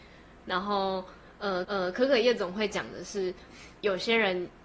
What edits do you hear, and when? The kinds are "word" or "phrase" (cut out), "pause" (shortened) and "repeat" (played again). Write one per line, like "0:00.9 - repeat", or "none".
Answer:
0:01.6 - repeat